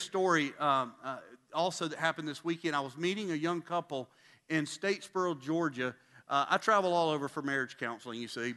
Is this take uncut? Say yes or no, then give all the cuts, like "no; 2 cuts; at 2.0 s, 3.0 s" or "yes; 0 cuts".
yes; 0 cuts